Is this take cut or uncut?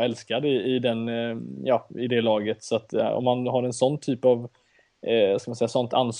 uncut